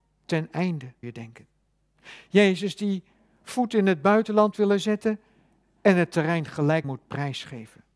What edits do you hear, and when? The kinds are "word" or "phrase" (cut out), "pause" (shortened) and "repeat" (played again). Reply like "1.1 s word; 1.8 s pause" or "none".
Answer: 1.0 s word; 4.5 s word; 6.8 s word

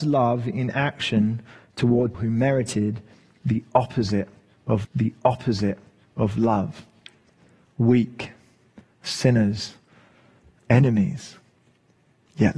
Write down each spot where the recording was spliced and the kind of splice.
2.1 s word; 4.8 s repeat

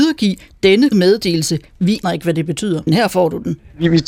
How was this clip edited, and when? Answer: 0.9 s word; 2.0 s word; 2.9 s word

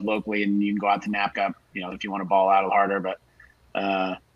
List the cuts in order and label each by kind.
1.3 s phrase; 1.9 s word; 2.7 s word

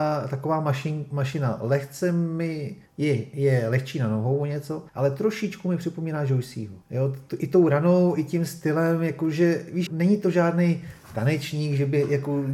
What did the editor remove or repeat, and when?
2.9 s pause; 4.9 s pause; 6.8 s pause; 9.9 s word

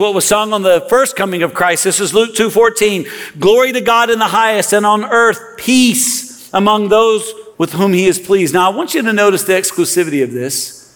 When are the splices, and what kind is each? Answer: 7.5 s pause

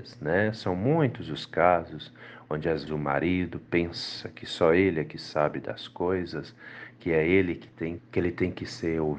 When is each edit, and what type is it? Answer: 2.9 s word; 8.0 s word

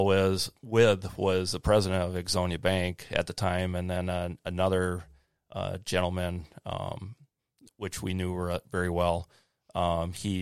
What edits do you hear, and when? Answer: none

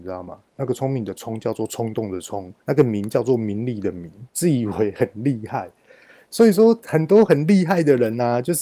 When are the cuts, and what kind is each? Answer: 2.6 s pause; 4.3 s pause

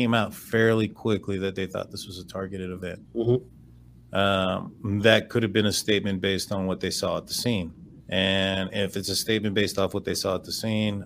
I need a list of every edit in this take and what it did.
3.1 s pause; 8.0 s pause

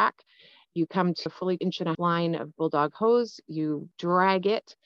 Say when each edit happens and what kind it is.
1.3 s word; 1.6 s word; 1.9 s word

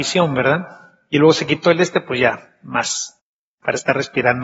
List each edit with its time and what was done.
none

